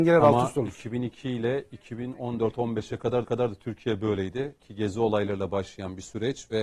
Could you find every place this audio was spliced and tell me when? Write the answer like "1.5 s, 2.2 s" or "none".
3.2 s, 4.6 s